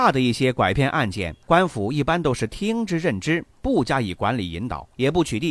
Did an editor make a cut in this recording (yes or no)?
yes